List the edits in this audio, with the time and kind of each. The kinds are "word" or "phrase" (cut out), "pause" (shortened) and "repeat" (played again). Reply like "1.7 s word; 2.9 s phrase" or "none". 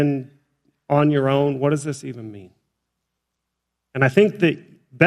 none